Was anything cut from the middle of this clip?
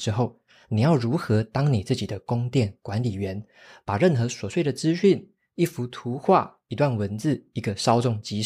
no; 0 cuts

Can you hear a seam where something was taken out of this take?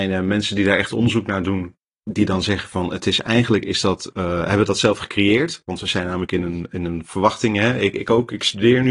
no; 0 cuts

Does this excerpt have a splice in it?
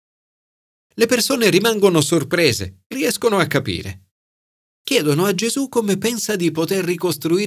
yes; 1 cut; at 2.9 s

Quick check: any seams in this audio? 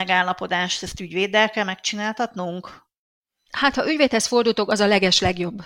no; 0 cuts

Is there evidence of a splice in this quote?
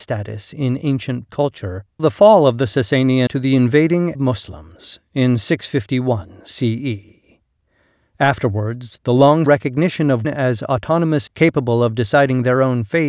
yes; 7 cuts; at 1.3 s, 2.0 s, 3.3 s, 4.1 s, 9.5 s, 10.2 s, 11.3 s

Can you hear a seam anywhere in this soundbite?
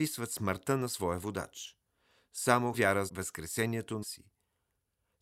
yes; 3 cuts; at 2.7 s, 3.1 s, 4.0 s

